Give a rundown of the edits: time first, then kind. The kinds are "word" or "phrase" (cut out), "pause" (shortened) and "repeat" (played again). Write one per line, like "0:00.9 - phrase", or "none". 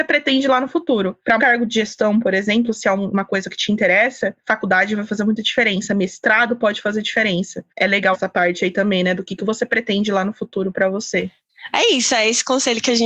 0:01.4 - word
0:07.7 - pause
0:08.1 - word